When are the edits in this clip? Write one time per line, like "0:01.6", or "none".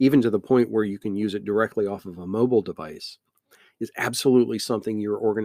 none

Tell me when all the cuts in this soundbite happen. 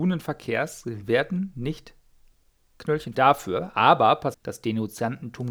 0:03.1
0:04.3

